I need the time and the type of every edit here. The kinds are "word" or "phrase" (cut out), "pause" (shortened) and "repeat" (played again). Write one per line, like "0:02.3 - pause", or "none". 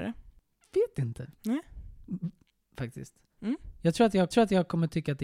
0:01.3 - pause
0:04.3 - repeat